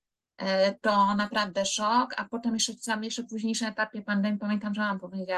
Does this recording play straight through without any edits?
yes; 0 cuts

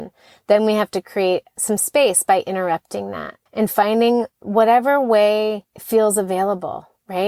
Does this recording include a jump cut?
yes; 3 cuts; at 1.5 s, 3.5 s, 5.7 s

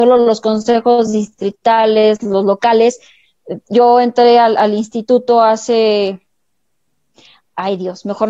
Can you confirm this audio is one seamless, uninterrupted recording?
yes; 0 cuts

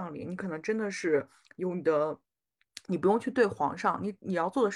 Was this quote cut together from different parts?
no; 0 cuts

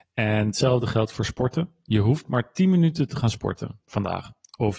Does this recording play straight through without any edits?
yes; 0 cuts

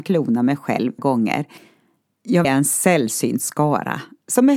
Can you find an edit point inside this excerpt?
yes; 2 cuts; at 1.0 s, 2.4 s

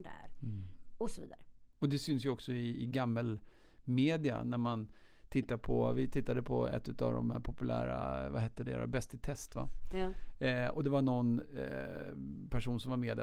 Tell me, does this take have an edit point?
no; 0 cuts

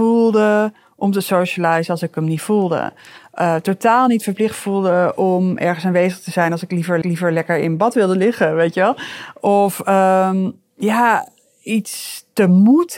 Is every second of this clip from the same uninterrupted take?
no; 1 cut; at 7.0 s

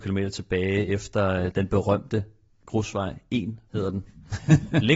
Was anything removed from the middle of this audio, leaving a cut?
yes; 2 cuts; at 1.5 s, 3.7 s

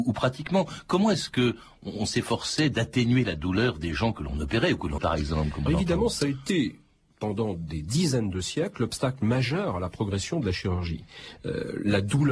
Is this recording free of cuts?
no; 2 cuts; at 5.0 s, 5.7 s

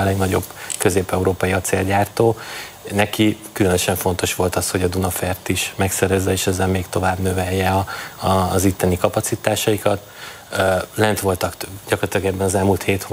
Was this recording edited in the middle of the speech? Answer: no; 0 cuts

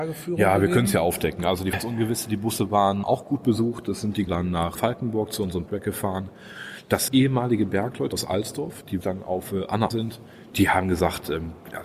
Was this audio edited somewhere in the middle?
yes; 9 cuts; at 1.7 s, 3.0 s, 4.3 s, 4.7 s, 5.7 s, 7.1 s, 8.1 s, 9.0 s, 9.9 s

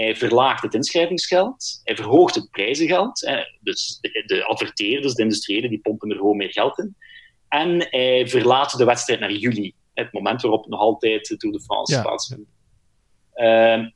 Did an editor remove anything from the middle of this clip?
no; 0 cuts

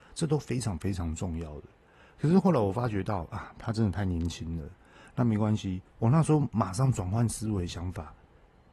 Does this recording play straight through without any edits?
no; 1 cut; at 5.9 s

